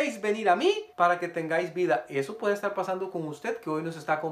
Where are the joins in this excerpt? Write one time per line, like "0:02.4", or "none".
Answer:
0:00.9